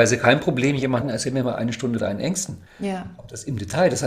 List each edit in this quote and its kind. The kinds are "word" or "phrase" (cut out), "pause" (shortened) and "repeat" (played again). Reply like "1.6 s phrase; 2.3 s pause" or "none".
1.0 s word; 2.0 s word; 2.7 s pause